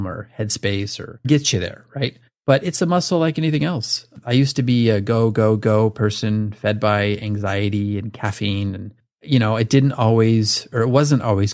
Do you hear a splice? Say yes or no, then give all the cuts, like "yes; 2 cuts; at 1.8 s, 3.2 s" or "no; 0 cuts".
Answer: yes; 1 cut; at 1.2 s